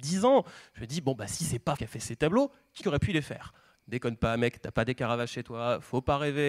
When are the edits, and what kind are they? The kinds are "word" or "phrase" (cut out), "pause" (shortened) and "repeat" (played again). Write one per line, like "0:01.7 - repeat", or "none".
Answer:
0:01.8 - word
0:02.8 - word
0:03.8 - word